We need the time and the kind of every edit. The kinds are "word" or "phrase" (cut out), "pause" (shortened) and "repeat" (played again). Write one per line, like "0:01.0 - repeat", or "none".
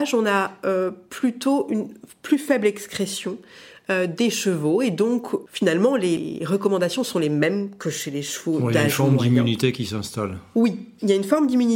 none

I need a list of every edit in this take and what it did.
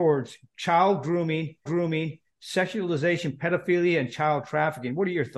0:01.7 - repeat

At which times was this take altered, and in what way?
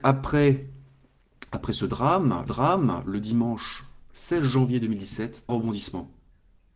0:02.5 - repeat
0:05.5 - phrase

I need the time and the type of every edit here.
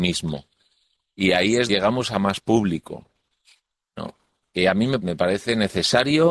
0:01.7 - word
0:05.0 - word

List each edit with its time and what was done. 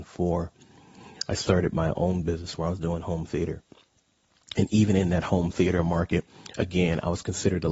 none

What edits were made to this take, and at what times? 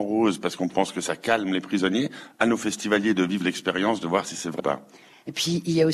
0:04.6 - word

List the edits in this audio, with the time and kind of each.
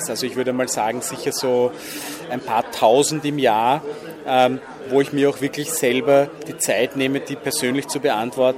none

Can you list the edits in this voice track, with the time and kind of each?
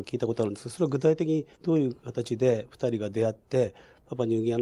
0:01.5 - pause

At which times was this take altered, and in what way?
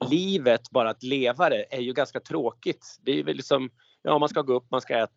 none

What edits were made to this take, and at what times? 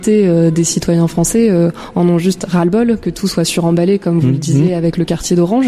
none

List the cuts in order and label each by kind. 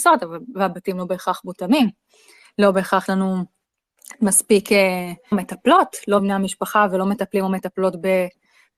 0:03.1 - word
0:05.3 - phrase
0:06.2 - word

